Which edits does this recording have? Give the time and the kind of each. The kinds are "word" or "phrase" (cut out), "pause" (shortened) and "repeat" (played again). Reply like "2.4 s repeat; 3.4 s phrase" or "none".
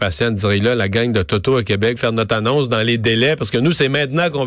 2.0 s phrase

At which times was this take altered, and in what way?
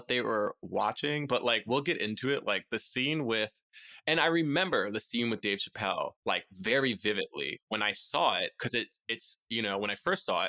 6.2 s pause

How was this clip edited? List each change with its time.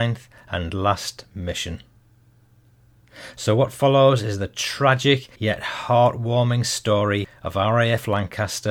5.3 s pause; 7.3 s pause

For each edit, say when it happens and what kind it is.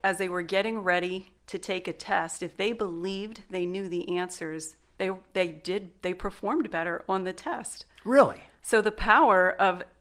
1.4 s pause

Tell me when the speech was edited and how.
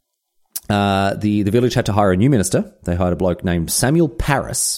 none

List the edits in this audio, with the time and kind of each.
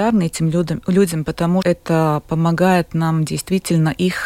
1.6 s word

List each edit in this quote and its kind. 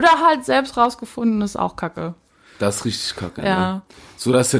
none

